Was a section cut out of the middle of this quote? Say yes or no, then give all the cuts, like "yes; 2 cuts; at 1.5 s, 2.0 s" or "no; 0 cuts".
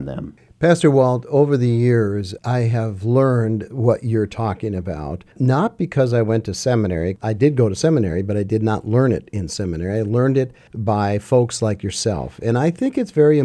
no; 0 cuts